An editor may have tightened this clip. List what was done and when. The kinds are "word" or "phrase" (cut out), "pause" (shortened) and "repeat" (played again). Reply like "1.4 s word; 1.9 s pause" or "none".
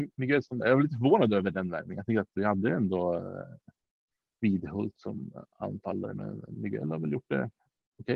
none